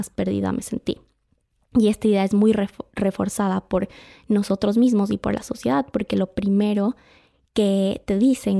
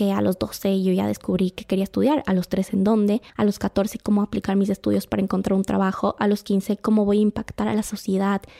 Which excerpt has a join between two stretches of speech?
second; 1 cut; at 3.3 s

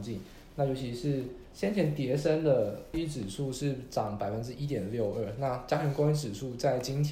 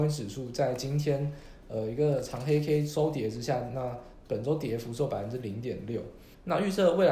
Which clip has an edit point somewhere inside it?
first; 1 cut; at 2.9 s

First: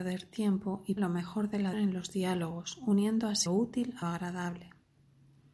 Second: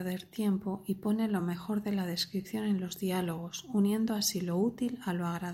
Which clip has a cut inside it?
first; 4 cuts; at 1.0 s, 1.7 s, 3.5 s, 4.0 s

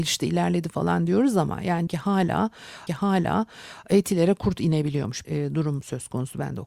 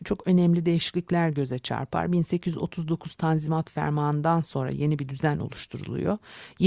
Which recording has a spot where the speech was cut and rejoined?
first; 3 cuts; at 1.9 s, 2.9 s, 5.2 s

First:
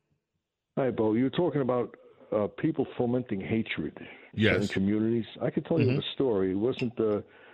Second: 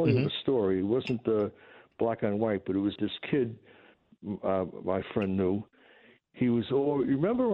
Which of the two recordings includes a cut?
second; 1 cut; at 3.0 s

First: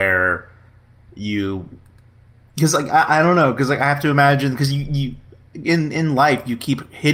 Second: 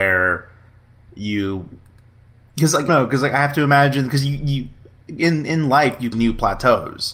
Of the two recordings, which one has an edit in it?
second; 2 cuts; at 2.9 s, 6.1 s

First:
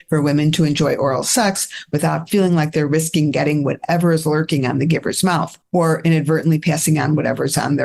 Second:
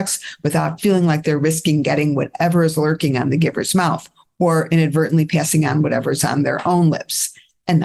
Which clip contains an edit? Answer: first; 1 cut; at 5.6 s

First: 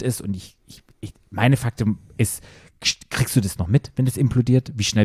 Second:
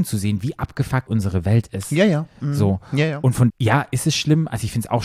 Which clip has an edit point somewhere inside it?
second; 2 cuts; at 1.1 s, 3.5 s

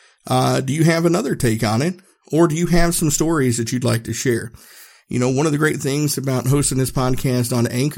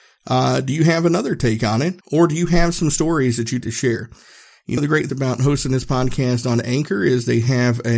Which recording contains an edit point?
second; 4 cuts; at 2.0 s, 3.6 s, 4.8 s, 5.1 s

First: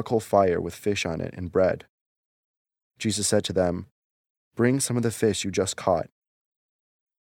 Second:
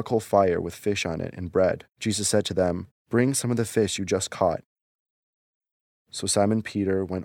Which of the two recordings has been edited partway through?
second; 2 cuts; at 1.9 s, 2.9 s

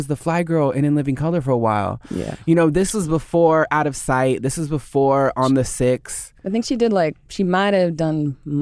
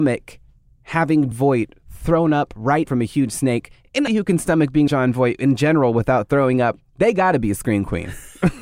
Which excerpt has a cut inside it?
second; 4 cuts; at 1.3 s, 2.9 s, 4.1 s, 4.9 s

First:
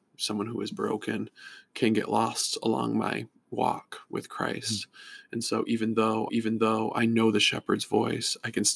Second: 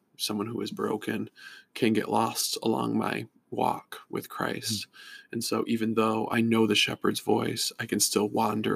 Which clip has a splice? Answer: first; 1 cut; at 6.3 s

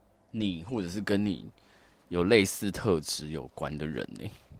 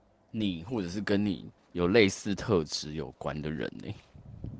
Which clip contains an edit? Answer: second; 1 cut; at 1.6 s

